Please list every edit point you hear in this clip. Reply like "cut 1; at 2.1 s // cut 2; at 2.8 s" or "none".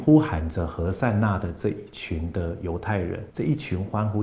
cut 1; at 3.3 s